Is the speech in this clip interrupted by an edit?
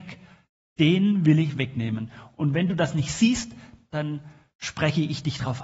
no; 0 cuts

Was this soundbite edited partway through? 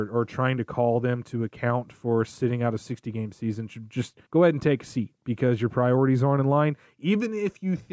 yes; 1 cut; at 4.3 s

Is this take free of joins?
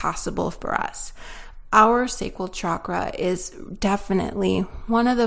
yes; 0 cuts

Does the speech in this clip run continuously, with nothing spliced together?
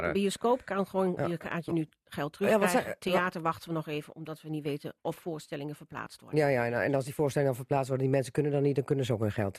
yes; 0 cuts

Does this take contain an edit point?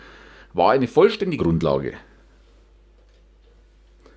yes; 1 cut; at 1.4 s

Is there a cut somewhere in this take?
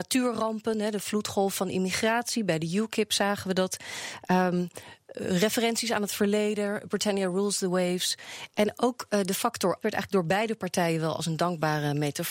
yes; 1 cut; at 9.8 s

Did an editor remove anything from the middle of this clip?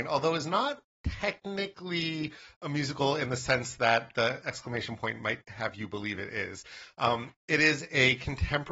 no; 0 cuts

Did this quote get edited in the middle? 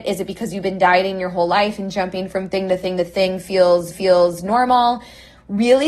yes; 1 cut; at 3.9 s

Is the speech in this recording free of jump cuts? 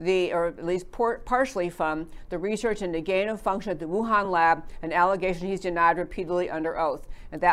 yes; 0 cuts

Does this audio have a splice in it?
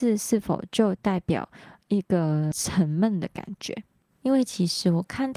no; 0 cuts

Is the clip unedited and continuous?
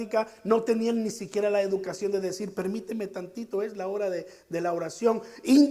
yes; 0 cuts

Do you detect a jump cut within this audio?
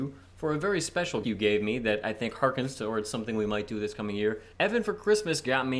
yes; 2 cuts; at 1.2 s, 4.5 s

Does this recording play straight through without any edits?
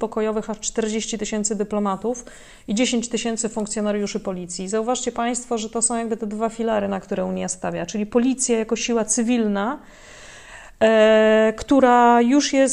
yes; 0 cuts

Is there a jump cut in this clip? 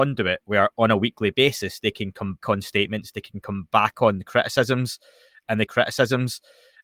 yes; 2 cuts; at 2.4 s, 5.7 s

